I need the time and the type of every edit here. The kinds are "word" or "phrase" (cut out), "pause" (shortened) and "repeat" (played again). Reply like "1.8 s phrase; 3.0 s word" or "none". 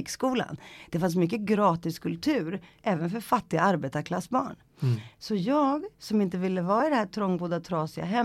5.9 s pause

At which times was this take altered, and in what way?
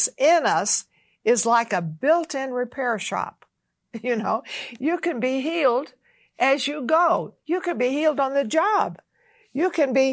none

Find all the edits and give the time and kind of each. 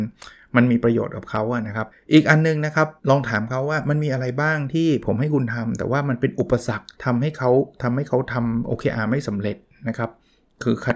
1.9 s pause; 3.0 s pause; 6.9 s pause

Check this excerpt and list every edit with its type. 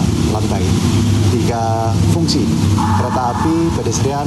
none

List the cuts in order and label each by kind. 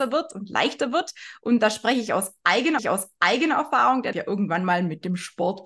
2.8 s repeat; 4.1 s phrase

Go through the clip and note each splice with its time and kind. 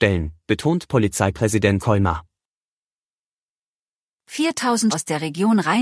1.8 s word; 4.9 s word

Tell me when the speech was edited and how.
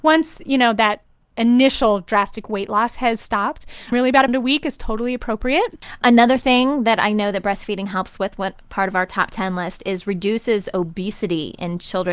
3.9 s word; 4.3 s word; 6.0 s word

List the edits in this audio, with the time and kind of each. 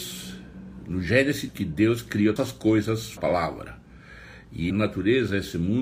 1.5 s word; 2.4 s word; 3.2 s word; 4.7 s word

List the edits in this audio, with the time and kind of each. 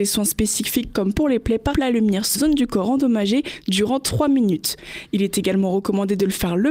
1.7 s word; 2.3 s phrase

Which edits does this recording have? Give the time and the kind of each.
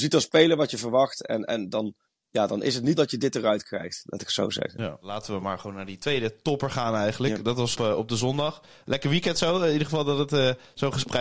3.0 s word; 7.7 s word

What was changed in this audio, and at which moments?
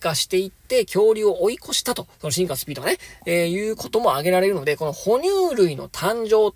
2.1 s pause

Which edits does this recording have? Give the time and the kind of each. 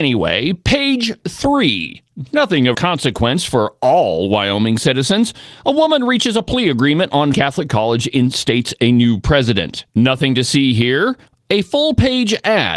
2.7 s word; 7.3 s phrase; 9.9 s pause

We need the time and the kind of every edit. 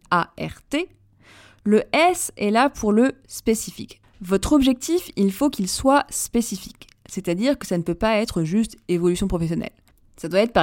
none

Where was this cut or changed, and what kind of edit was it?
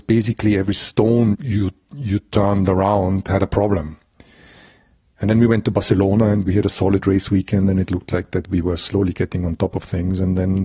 1.3 s word

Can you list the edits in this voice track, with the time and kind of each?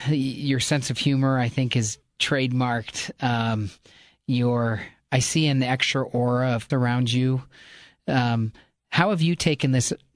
6.7 s word

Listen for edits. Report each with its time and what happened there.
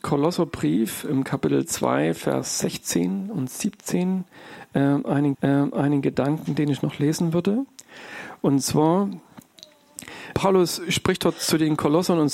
5.3 s repeat; 10.3 s word

